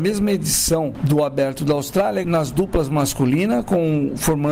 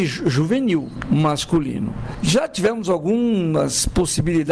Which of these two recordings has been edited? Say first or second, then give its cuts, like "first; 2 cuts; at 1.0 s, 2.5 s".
first; 1 cut; at 2.2 s